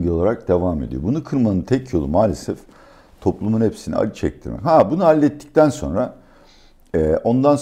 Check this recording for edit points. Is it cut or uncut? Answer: uncut